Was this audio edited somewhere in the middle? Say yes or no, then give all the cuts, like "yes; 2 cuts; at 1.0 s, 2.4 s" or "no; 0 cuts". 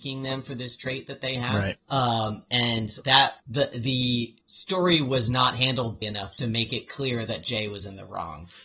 yes; 5 cuts; at 1.8 s, 3.0 s, 3.4 s, 4.4 s, 6.0 s